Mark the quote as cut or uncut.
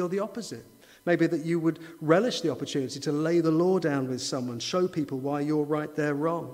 uncut